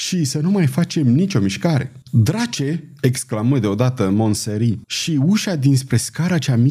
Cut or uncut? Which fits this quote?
cut